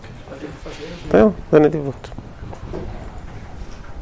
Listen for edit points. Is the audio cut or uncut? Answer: uncut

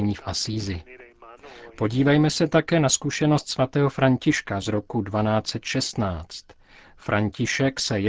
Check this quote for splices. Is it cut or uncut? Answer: uncut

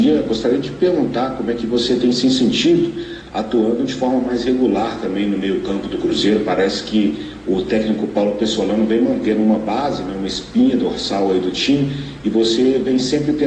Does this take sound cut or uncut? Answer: uncut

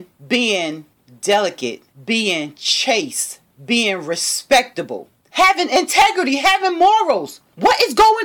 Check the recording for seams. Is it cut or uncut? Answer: uncut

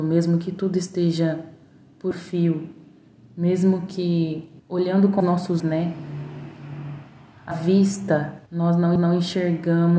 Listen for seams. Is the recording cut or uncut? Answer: cut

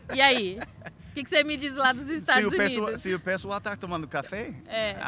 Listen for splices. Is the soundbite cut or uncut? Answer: uncut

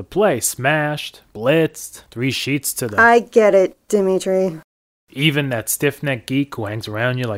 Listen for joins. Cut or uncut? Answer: uncut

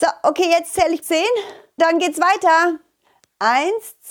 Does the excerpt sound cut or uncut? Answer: cut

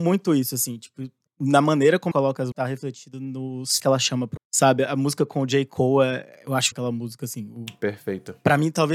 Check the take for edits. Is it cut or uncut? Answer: cut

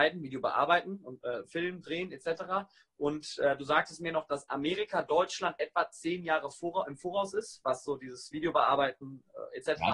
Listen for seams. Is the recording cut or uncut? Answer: uncut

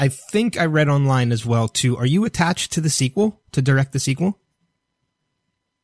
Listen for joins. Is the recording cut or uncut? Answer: uncut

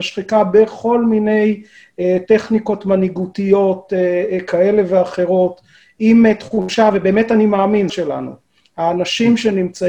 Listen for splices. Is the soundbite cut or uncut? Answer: cut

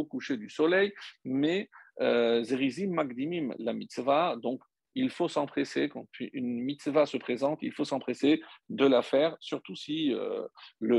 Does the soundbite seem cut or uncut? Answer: uncut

